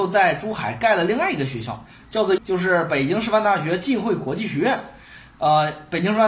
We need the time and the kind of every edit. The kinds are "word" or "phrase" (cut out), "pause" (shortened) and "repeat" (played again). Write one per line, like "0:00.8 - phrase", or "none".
0:02.4 - word